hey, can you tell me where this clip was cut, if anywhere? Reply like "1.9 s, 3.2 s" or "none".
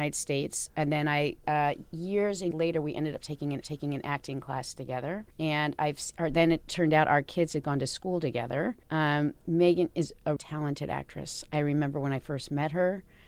1.4 s, 2.5 s, 3.6 s, 5.3 s, 8.8 s, 10.4 s

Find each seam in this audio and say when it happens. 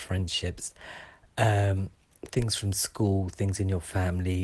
none

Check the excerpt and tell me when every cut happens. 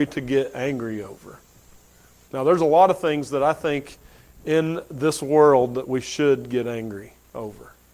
none

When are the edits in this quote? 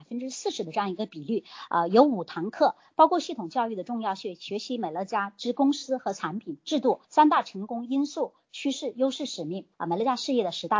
7.0 s, 9.7 s

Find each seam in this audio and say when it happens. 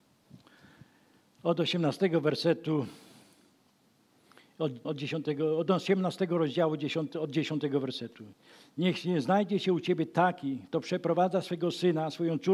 4.8 s

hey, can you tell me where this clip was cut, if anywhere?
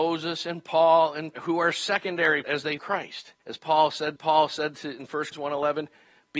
1.3 s, 2.4 s, 2.8 s, 3.4 s, 4.2 s, 5.3 s

